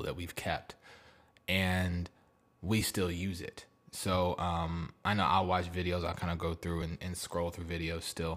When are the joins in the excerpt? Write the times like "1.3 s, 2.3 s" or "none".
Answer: none